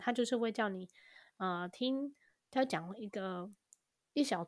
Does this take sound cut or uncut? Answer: uncut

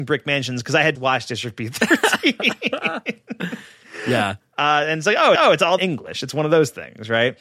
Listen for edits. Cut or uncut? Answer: cut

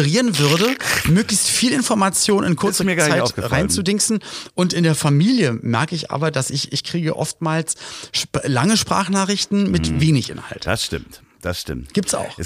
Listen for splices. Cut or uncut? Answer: uncut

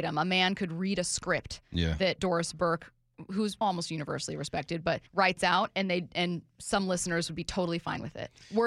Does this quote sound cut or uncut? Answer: cut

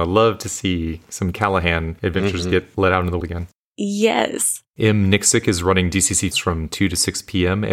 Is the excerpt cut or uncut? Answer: cut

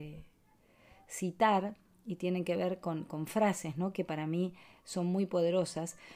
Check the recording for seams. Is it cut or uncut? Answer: uncut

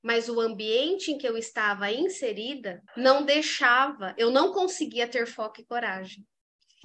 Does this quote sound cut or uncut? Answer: cut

